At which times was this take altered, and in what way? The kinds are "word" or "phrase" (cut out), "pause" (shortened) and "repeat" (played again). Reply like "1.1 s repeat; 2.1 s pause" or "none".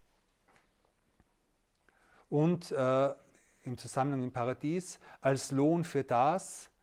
3.3 s pause